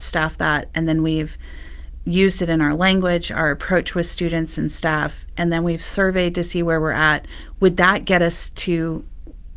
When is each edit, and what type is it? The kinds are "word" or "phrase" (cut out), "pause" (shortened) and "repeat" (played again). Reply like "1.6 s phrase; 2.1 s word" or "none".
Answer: none